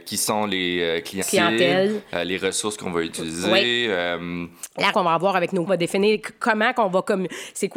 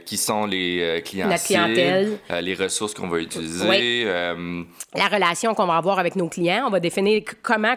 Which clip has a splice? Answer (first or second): first